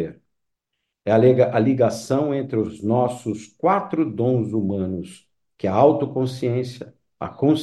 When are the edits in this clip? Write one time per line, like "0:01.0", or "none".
none